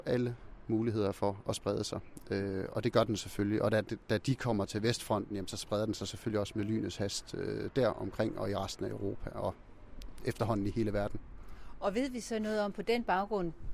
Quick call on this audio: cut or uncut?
uncut